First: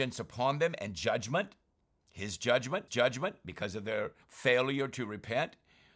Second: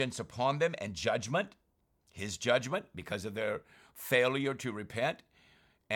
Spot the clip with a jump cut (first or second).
first